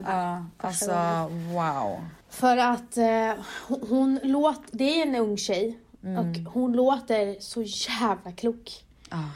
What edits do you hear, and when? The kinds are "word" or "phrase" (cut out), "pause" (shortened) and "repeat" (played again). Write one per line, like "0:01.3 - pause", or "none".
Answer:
0:02.2 - pause